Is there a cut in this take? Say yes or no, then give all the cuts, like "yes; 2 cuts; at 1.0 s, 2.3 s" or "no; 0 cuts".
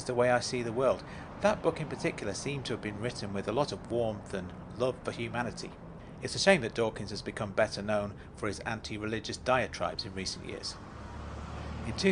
no; 0 cuts